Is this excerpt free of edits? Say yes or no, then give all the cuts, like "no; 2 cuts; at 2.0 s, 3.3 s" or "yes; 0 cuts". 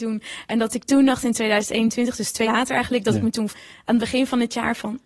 no; 2 cuts; at 2.4 s, 3.5 s